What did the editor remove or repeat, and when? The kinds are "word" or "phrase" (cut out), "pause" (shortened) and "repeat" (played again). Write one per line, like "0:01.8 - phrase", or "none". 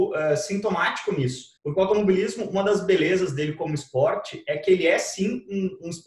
0:01.6 - pause